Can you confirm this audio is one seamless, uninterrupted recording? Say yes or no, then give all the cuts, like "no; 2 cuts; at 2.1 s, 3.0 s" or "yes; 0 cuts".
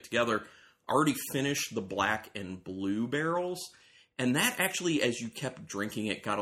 yes; 0 cuts